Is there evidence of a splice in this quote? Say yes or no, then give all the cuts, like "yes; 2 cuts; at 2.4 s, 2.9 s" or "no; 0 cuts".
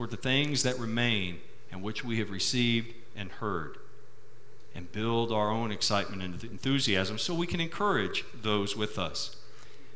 no; 0 cuts